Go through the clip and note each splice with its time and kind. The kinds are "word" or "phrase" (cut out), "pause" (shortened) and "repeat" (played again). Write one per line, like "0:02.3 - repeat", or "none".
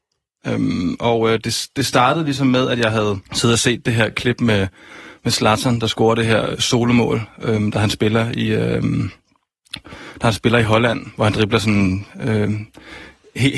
0:03.3 - pause